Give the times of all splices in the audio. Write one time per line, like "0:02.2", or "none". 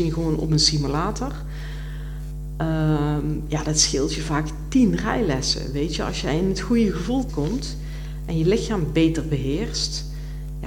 0:07.3